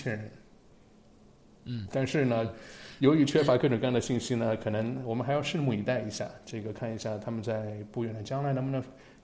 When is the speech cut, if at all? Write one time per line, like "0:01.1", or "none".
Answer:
none